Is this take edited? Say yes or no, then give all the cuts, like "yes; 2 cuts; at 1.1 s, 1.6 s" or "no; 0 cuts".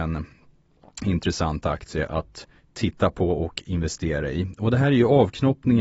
yes; 1 cut; at 2.6 s